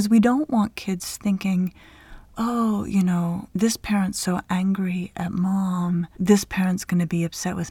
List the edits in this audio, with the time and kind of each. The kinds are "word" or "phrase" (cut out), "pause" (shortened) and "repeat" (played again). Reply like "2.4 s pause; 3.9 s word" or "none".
3.5 s pause; 6.1 s pause